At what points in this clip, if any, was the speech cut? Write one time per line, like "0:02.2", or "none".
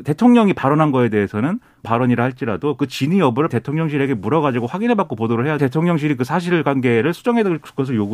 0:01.8
0:03.5
0:05.6